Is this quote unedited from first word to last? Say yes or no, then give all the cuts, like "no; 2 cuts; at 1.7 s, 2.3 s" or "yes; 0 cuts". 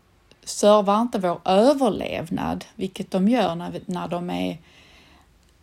yes; 0 cuts